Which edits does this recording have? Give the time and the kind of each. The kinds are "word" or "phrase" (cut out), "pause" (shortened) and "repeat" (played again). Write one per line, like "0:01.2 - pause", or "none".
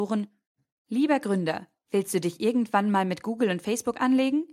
none